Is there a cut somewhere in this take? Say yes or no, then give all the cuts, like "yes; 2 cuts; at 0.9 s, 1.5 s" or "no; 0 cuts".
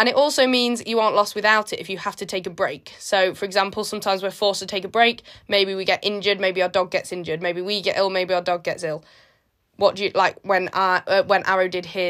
no; 0 cuts